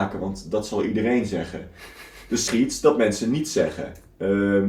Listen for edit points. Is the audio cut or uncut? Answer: cut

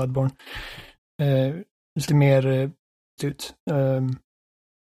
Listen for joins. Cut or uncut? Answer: cut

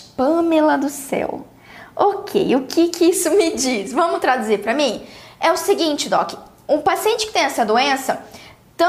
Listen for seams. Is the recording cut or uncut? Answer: uncut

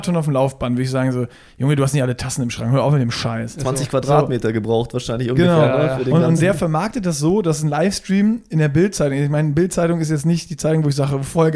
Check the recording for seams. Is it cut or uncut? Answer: uncut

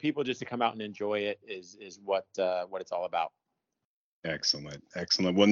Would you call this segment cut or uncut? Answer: uncut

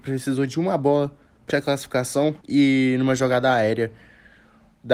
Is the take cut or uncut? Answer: cut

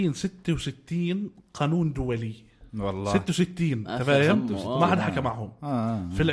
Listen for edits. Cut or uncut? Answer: cut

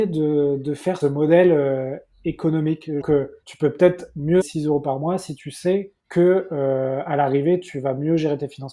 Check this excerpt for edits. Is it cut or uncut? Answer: cut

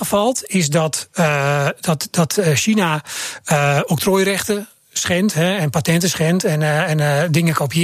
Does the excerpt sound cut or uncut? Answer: uncut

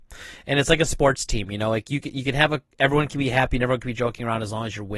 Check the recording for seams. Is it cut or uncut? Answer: uncut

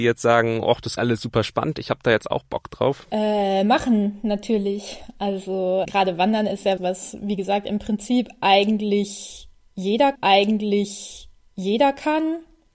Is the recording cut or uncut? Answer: cut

